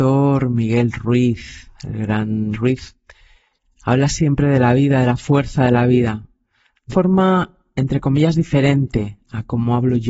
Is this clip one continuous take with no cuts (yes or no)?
no